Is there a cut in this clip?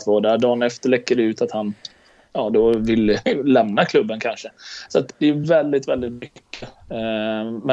no; 0 cuts

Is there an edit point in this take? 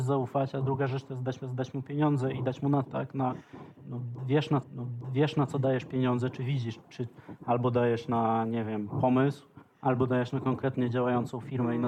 yes; 4 cuts; at 1.4 s, 2.8 s, 4.6 s, 6.8 s

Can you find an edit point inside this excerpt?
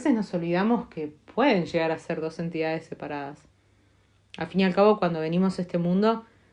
no; 0 cuts

